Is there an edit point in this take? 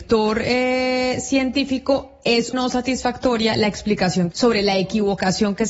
yes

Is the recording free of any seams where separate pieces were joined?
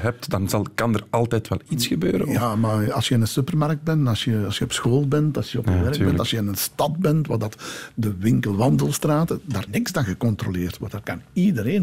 no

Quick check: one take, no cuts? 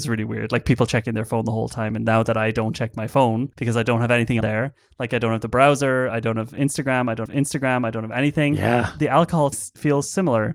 no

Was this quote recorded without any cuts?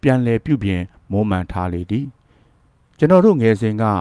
yes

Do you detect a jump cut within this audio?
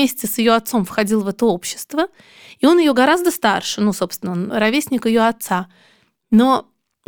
no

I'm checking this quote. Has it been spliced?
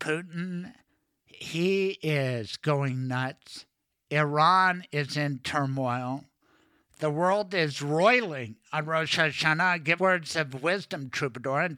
yes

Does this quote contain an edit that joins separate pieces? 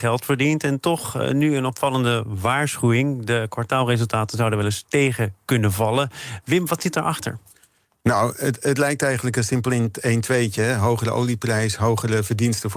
no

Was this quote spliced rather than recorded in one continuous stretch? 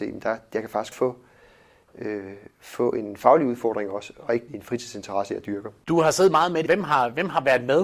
yes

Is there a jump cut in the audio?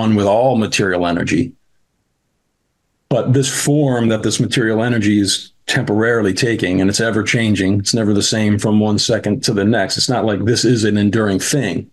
no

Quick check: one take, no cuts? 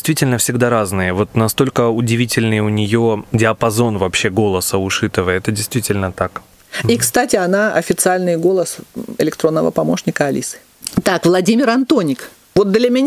yes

